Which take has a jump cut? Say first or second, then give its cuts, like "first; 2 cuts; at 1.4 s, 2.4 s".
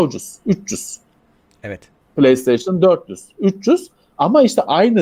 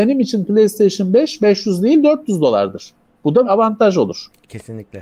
second; 1 cut; at 3.4 s